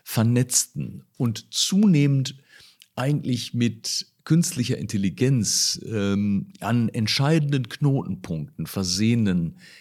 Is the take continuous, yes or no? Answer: yes